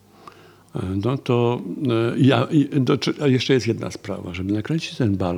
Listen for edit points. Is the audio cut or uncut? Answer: uncut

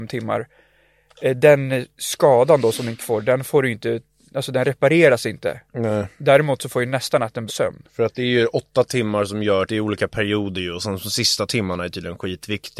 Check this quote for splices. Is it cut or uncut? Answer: cut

